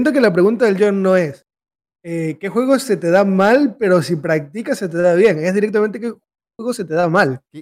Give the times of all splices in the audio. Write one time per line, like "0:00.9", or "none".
none

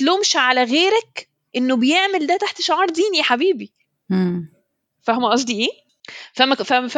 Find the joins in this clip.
none

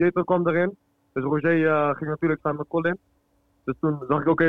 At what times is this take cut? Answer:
0:02.4

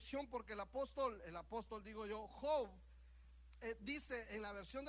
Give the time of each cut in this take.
none

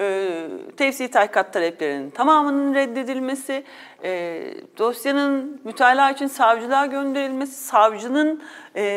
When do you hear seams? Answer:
none

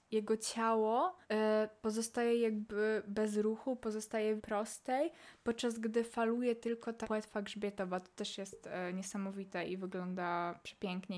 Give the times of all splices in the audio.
0:01.2
0:04.4
0:07.0

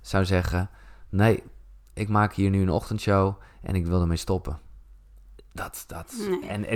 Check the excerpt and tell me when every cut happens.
none

